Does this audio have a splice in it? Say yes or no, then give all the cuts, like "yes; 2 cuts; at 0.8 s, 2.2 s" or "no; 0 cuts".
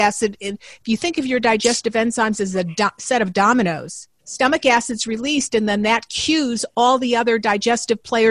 yes; 1 cut; at 4.2 s